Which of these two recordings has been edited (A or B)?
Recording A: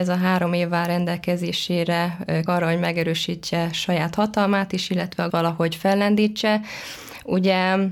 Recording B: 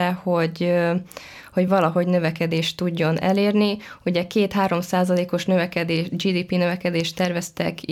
A